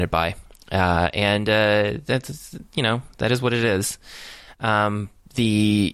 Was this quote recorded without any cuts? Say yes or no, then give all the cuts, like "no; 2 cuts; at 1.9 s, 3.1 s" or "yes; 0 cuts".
yes; 0 cuts